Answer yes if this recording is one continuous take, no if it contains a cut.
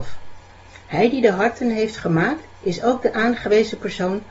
yes